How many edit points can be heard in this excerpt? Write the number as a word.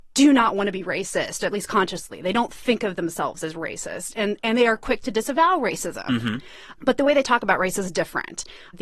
zero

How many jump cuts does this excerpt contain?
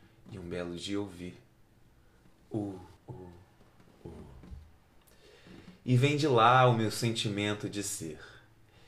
one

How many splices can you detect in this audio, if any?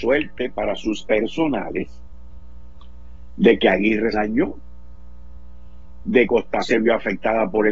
four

